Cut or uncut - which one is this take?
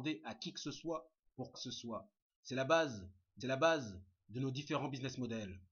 cut